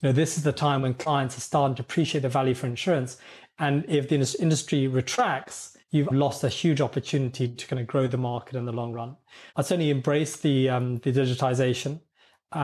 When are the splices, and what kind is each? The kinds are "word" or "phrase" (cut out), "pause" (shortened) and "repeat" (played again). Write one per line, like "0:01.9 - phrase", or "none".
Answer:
0:05.8 - pause
0:09.5 - pause

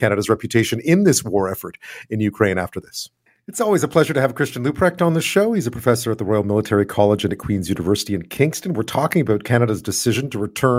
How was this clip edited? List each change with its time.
0:03.3 - pause

